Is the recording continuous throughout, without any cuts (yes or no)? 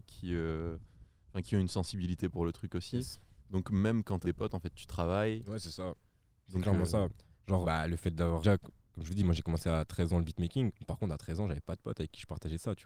no